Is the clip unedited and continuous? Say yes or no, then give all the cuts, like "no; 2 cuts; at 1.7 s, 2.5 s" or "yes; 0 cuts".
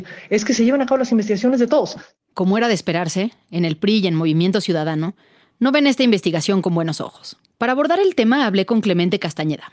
yes; 0 cuts